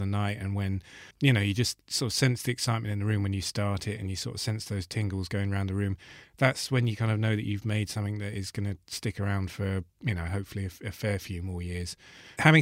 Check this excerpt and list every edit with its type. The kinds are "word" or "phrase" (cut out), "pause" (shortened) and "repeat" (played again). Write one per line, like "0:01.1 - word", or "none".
0:01.1 - pause